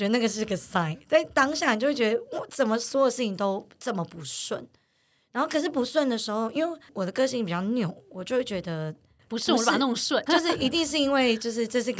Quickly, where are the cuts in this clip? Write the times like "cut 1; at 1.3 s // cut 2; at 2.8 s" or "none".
cut 1; at 10.3 s

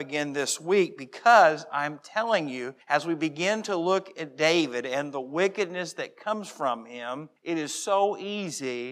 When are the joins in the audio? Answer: cut 1; at 2.8 s // cut 2; at 7.4 s

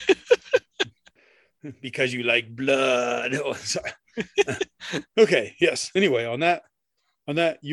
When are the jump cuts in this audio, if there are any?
cut 1; at 5.1 s

